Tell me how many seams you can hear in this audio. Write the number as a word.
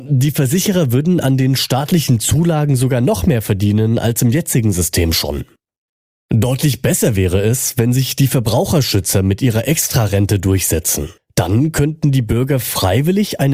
one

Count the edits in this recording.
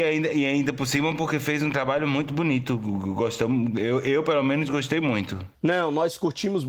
one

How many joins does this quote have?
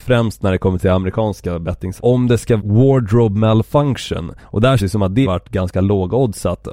five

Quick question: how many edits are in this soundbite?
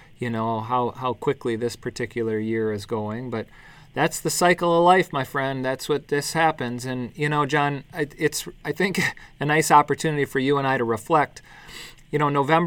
one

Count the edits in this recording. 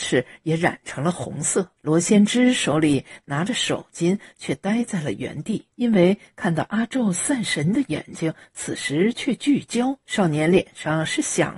three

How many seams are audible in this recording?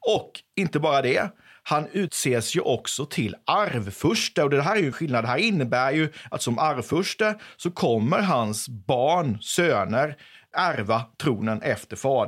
one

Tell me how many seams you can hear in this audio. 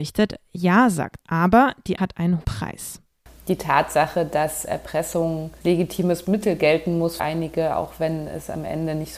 six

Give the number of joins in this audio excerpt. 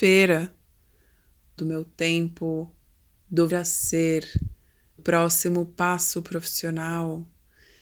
three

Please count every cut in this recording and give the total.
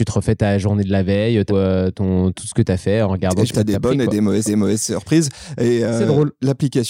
three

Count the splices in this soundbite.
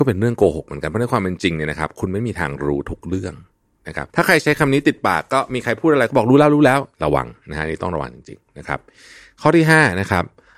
two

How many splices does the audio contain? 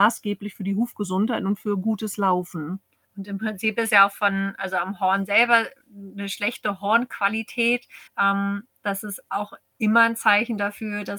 two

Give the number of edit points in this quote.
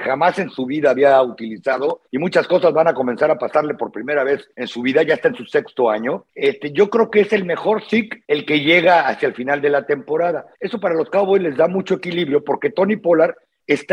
five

